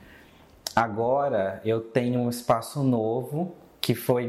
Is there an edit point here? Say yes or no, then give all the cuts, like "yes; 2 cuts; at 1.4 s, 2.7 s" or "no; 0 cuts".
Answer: no; 0 cuts